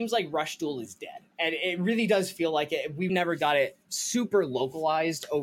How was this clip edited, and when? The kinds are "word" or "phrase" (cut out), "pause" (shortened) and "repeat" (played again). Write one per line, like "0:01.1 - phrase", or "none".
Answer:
0:01.3 - pause
0:03.1 - word